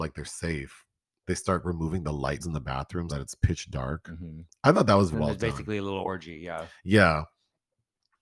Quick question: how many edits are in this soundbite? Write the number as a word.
three